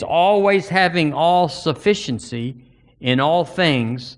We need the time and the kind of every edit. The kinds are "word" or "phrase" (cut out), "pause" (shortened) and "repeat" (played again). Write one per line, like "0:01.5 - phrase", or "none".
none